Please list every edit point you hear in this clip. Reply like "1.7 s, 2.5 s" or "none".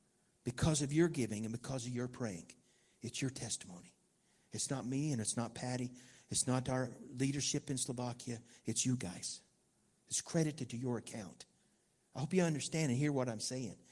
none